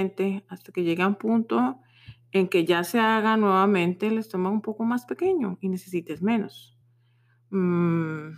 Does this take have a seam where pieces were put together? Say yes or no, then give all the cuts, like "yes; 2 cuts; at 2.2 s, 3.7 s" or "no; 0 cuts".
no; 0 cuts